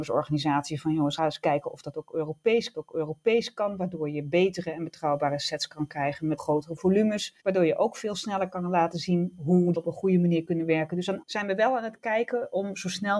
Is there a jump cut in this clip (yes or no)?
yes